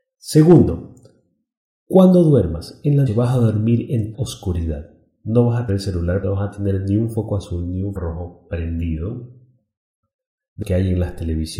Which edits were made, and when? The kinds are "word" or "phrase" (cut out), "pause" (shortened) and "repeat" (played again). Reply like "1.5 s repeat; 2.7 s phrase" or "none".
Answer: 3.1 s word; 4.1 s word; 5.7 s word; 6.2 s word; 8.0 s word; 10.6 s word